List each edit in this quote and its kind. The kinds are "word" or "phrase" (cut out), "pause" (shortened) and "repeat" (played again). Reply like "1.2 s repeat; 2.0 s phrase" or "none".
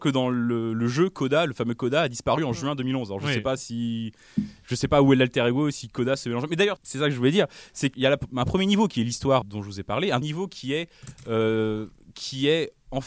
6.8 s word; 7.9 s word; 9.4 s word; 10.2 s word